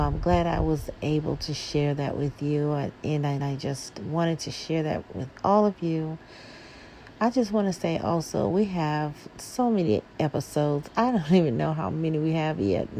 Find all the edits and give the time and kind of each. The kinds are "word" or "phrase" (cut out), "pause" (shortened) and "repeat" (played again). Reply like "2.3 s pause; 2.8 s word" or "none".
3.4 s phrase